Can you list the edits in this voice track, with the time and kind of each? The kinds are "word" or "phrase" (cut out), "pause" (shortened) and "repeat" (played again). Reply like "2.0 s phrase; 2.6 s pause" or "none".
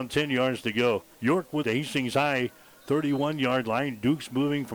1.1 s pause; 1.6 s phrase